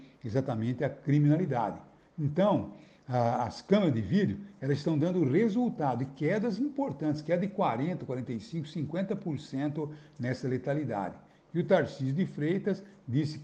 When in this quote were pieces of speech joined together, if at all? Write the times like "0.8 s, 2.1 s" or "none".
none